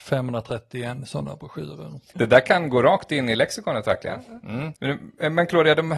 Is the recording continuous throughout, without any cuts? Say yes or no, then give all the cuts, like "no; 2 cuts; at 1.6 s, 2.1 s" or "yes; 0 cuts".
no; 1 cut; at 4.8 s